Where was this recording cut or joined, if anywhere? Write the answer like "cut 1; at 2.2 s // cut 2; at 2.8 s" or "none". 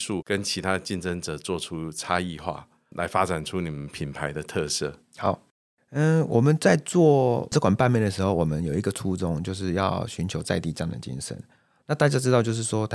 none